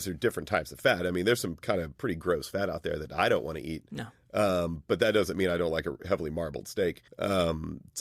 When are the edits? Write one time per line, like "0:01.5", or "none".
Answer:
0:07.1